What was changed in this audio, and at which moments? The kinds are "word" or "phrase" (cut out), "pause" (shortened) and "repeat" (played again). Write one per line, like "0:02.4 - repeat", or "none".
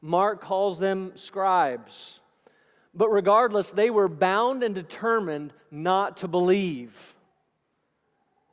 none